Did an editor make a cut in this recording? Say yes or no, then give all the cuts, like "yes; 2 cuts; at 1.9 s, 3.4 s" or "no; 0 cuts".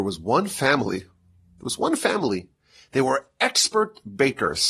no; 0 cuts